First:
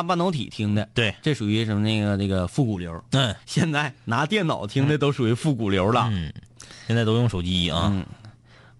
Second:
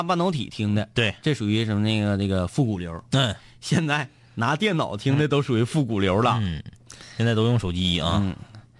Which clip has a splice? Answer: first; 2 cuts; at 3.4 s, 3.9 s

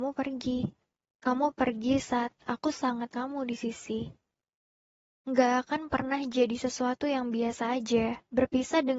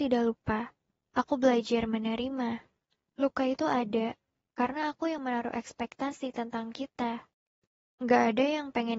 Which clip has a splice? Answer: first; 1 cut; at 3.1 s

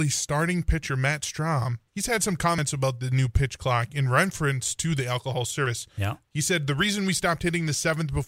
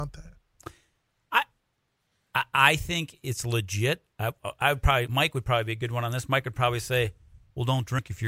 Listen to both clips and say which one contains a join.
first; 1 cut; at 1.9 s

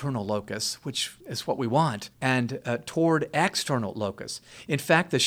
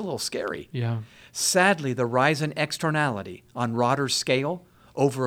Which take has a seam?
first; 2 cuts; at 1.2 s, 2.1 s

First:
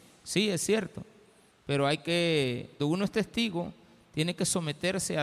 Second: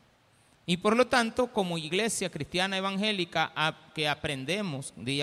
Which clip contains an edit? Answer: first; 1 cut; at 2.8 s

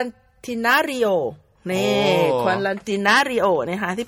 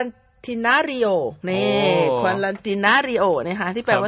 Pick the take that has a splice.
second; 1 cut; at 1.4 s

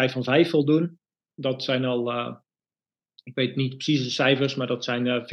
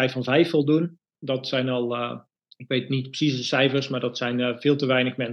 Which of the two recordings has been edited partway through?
second; 2 cuts; at 1.1 s, 2.4 s

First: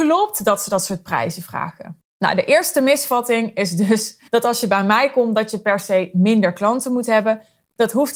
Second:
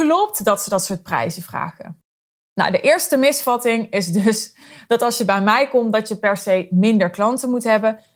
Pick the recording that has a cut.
first; 2 cuts; at 2.1 s, 4.3 s

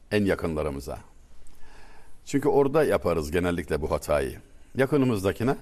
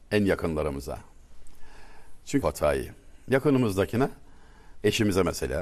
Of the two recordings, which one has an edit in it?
second; 1 cut; at 2.4 s

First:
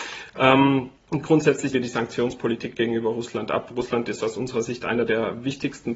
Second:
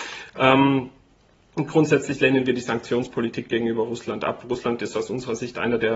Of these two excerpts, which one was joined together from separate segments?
first; 2 cuts; at 1.0 s, 1.7 s

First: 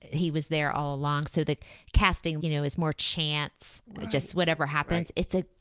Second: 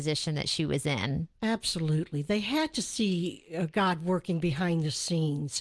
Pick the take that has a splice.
first; 2 cuts; at 2.4 s, 3.9 s

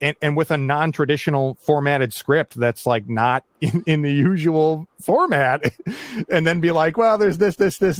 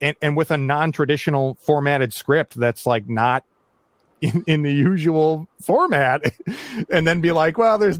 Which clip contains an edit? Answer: first; 1 cut; at 3.5 s

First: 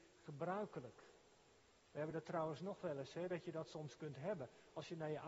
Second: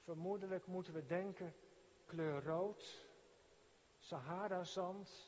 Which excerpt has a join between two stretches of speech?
second; 1 cut; at 2.0 s

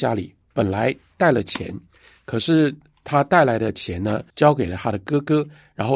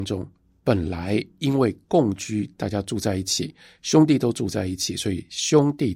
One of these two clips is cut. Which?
first; 1 cut; at 4.3 s

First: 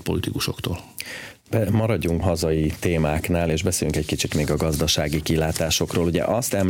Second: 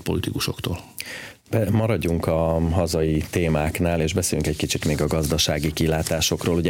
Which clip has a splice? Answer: first; 1 cut; at 2.2 s

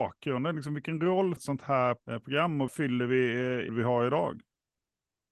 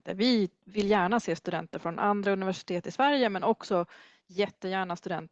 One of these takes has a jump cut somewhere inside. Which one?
first; 4 cuts; at 1.4 s, 2.0 s, 2.7 s, 3.7 s

